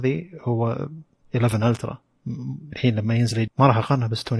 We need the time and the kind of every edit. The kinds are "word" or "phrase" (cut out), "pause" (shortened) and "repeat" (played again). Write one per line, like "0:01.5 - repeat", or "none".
0:01.2 - word
0:02.7 - word
0:03.5 - word

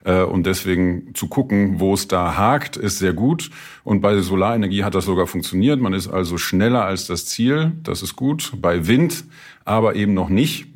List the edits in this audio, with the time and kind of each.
none

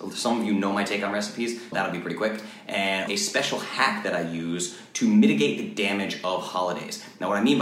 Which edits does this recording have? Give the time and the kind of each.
0:01.7 - word
0:03.1 - word

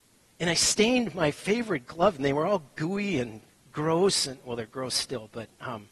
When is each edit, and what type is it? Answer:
0:03.5 - pause

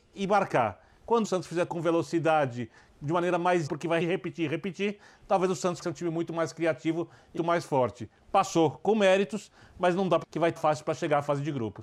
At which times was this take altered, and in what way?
0:01.2 - word
0:01.7 - word
0:03.7 - word
0:04.0 - word
0:05.8 - word
0:07.4 - word
0:10.2 - word
0:10.6 - word

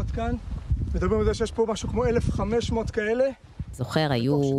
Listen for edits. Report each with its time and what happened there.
none

